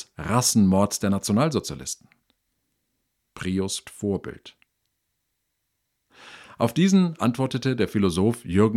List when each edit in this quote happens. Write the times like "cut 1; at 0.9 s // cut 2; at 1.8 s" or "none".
cut 1; at 3.8 s // cut 2; at 7.2 s